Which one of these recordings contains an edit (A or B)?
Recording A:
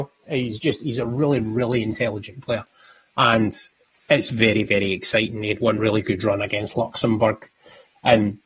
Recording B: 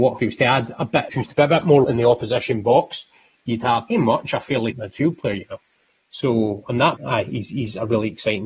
B